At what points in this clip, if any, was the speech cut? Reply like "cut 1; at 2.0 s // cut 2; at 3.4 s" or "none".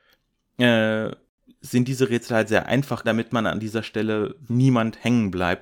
cut 1; at 3.0 s // cut 2; at 4.5 s